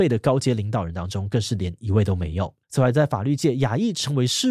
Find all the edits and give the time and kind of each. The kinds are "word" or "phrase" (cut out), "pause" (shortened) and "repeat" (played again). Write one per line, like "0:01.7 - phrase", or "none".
0:02.6 - pause